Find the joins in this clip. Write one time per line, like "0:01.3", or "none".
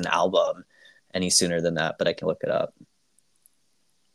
0:02.2